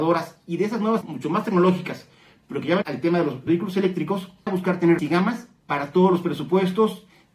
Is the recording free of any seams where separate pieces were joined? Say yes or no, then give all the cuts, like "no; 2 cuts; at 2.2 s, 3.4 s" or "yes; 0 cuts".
no; 5 cuts; at 1.0 s, 2.8 s, 3.5 s, 4.5 s, 5.0 s